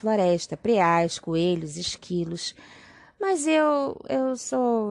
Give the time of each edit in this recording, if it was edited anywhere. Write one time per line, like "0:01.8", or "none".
none